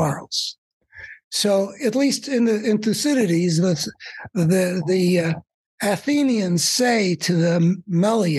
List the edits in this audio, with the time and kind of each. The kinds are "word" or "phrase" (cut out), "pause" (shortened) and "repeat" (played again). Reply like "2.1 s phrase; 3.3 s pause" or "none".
none